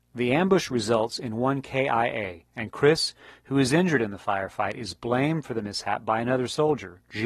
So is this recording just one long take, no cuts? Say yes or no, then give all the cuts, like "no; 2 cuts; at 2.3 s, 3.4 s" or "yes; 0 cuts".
yes; 0 cuts